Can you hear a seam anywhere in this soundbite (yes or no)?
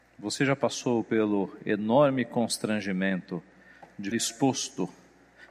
yes